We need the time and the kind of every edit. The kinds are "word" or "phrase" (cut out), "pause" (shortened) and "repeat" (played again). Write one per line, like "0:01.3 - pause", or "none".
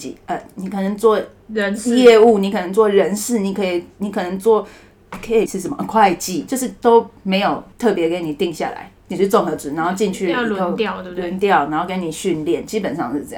0:05.5 - word
0:06.5 - word
0:07.7 - pause